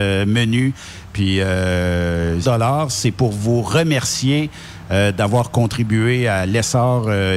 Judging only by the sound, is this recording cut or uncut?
cut